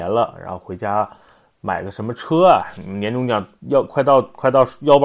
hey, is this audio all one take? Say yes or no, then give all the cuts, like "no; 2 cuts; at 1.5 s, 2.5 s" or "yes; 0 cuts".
yes; 0 cuts